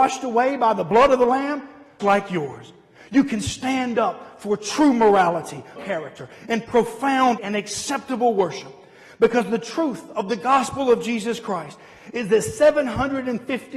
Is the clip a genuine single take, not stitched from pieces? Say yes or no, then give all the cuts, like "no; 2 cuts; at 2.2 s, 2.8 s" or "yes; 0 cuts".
no; 3 cuts; at 2.0 s, 5.8 s, 7.4 s